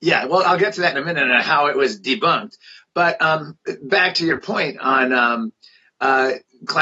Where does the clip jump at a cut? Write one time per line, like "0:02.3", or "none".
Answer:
none

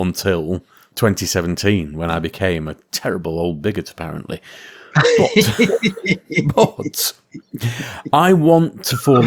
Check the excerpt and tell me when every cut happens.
none

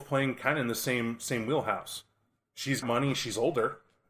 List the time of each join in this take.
0:02.8

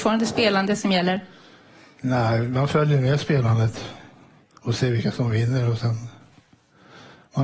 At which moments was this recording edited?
none

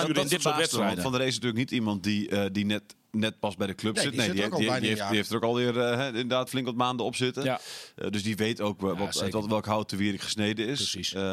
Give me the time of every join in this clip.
0:06.5

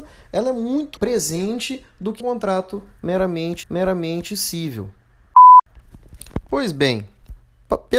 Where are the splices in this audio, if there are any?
0:01.0
0:02.2
0:03.6

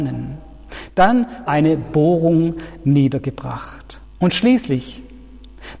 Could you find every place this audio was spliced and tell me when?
0:01.5
0:04.0

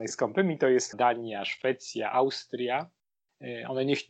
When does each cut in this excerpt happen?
0:00.9

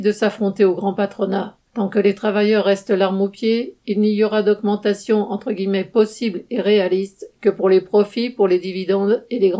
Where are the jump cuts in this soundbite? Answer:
0:01.7

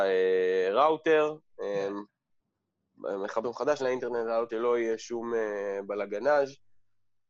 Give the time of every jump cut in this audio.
0:03.4
0:03.8
0:04.5

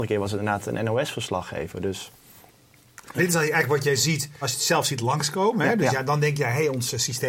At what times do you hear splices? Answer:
0:03.2
0:04.4

